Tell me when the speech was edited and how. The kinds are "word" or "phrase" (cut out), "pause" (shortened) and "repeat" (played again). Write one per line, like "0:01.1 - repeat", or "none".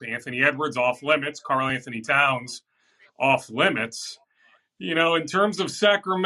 none